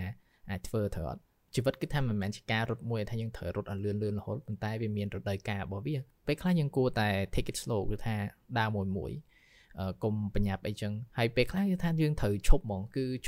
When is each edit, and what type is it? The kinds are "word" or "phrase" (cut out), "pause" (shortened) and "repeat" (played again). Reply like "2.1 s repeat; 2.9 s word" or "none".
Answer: 11.1 s pause

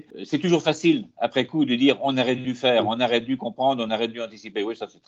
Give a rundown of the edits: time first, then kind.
none

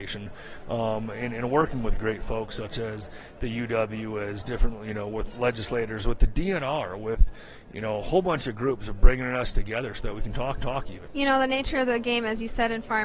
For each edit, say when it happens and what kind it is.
10.6 s repeat

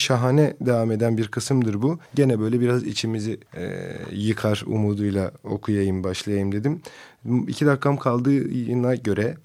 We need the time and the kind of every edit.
2.1 s pause; 3.5 s pause

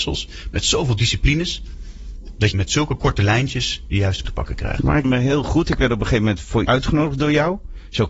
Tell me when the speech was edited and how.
2.5 s word; 4.2 s word; 5.0 s word; 6.7 s word

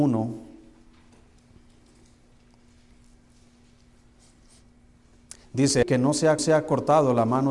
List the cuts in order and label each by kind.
5.8 s word; 6.4 s repeat

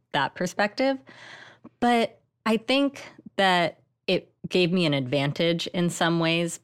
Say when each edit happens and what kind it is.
4.4 s pause

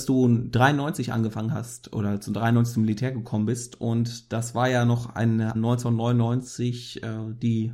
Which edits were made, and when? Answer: 5.5 s phrase

